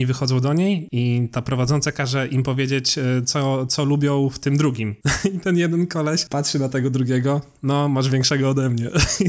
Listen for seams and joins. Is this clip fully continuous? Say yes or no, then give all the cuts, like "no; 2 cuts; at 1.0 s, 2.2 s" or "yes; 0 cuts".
yes; 0 cuts